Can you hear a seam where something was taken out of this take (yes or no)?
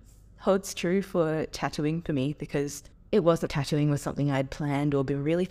yes